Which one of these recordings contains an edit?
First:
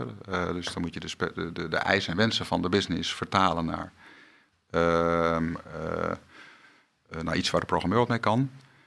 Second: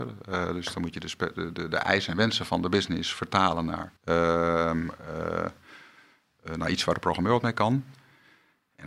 second; 1 cut; at 4.0 s

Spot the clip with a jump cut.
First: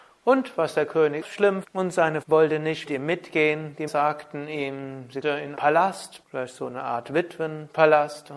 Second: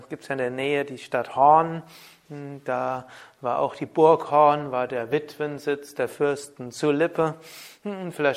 first; 8 cuts; at 1.2 s, 1.6 s, 2.2 s, 2.9 s, 3.9 s, 5.2 s, 5.5 s, 6.2 s

